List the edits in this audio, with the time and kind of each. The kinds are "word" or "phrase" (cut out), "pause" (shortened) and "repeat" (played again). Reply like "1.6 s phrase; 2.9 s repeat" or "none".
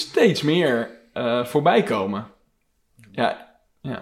none